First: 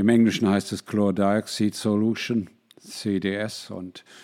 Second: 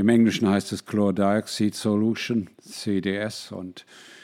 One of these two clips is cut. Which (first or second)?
second